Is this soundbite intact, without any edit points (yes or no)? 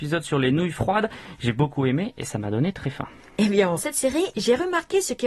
no